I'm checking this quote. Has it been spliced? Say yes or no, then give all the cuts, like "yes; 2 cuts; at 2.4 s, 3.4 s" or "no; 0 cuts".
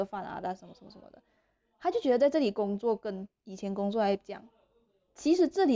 no; 0 cuts